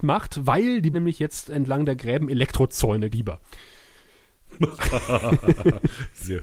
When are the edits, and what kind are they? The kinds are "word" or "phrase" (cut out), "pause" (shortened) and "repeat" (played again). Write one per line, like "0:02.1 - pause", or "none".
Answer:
0:00.9 - word
0:03.1 - phrase